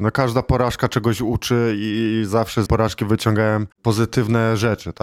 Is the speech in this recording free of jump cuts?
no; 2 cuts; at 2.7 s, 3.7 s

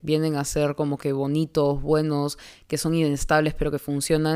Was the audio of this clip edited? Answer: no; 0 cuts

